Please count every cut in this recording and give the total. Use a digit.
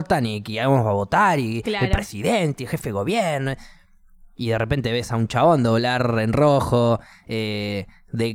0